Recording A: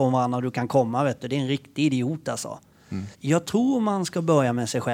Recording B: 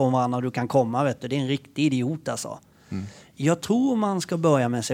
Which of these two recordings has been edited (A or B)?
A